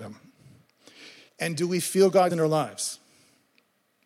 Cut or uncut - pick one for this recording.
cut